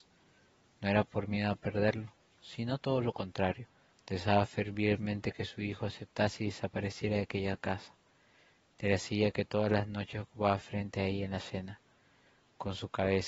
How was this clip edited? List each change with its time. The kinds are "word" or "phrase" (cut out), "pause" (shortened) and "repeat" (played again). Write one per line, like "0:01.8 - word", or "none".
0:03.9 - pause